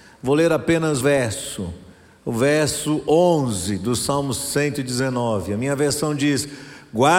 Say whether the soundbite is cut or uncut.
cut